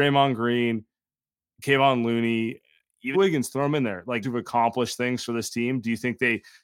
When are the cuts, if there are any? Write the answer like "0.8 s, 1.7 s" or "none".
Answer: 3.1 s, 4.2 s